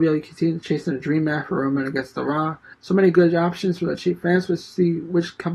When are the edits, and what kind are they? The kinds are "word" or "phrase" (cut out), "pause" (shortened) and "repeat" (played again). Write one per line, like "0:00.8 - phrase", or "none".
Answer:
0:02.7 - pause
0:04.0 - word